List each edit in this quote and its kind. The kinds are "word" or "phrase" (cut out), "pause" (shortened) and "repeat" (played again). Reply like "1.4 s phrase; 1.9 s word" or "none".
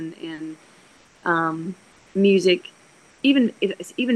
1.9 s pause